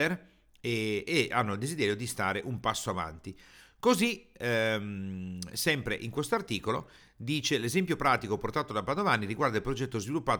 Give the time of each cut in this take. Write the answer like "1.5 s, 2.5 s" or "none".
none